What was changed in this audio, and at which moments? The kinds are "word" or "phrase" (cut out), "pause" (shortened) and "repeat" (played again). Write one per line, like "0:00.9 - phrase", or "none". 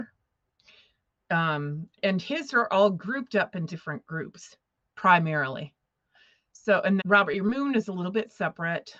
0:01.9 - word
0:03.7 - word
0:07.0 - word

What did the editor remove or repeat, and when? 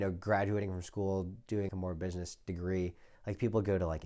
0:01.7 - word

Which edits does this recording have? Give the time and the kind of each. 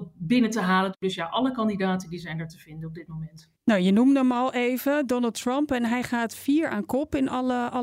0:03.6 - pause

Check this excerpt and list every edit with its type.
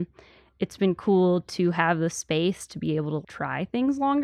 0:03.2 - word

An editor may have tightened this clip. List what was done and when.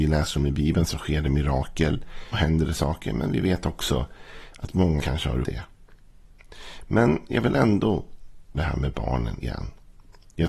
0:02.3 - word
0:05.0 - word
0:05.4 - word
0:08.5 - word
0:09.4 - word

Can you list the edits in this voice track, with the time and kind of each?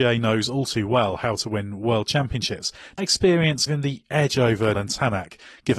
0:03.0 - word
0:03.7 - word
0:04.7 - word

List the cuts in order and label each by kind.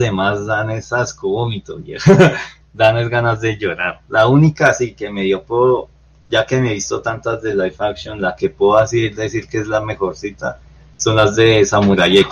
none

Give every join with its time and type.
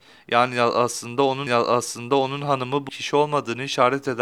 0:01.5 - repeat
0:02.9 - phrase

